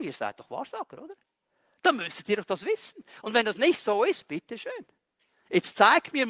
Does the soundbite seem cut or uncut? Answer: uncut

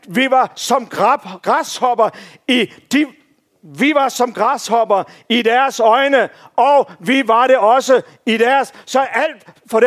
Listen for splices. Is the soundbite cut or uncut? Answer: uncut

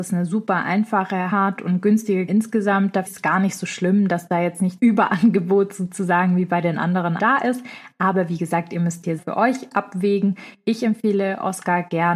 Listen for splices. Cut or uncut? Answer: cut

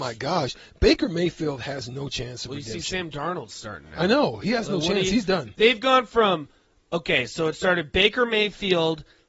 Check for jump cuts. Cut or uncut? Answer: uncut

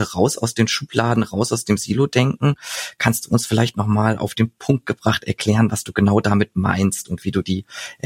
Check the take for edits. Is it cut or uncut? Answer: uncut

